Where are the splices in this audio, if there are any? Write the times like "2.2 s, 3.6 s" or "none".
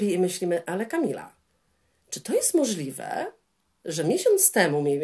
none